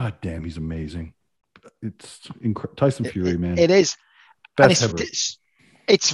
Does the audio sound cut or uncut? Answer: cut